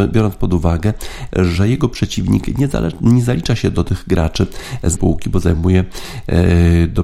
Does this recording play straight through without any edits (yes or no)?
no